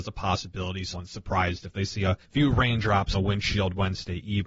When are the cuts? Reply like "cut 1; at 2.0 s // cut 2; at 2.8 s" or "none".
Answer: cut 1; at 0.9 s // cut 2; at 2.2 s // cut 3; at 3.1 s

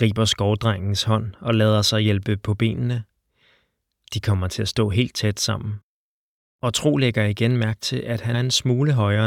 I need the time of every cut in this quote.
cut 1; at 8.3 s

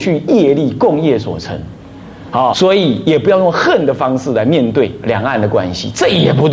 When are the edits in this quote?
cut 1; at 2.5 s

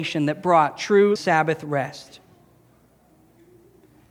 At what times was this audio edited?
cut 1; at 1.2 s

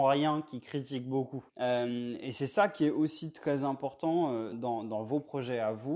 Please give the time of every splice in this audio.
cut 1; at 1.5 s // cut 2; at 4.5 s

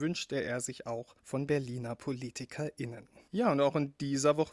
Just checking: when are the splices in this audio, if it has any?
cut 1; at 1.2 s // cut 2; at 3.3 s

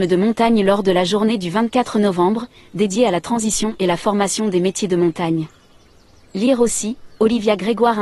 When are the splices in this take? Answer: none

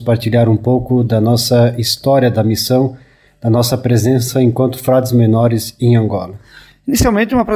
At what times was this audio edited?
none

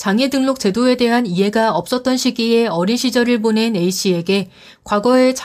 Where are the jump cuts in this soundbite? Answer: none

